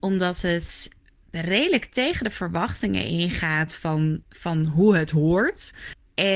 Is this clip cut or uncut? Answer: uncut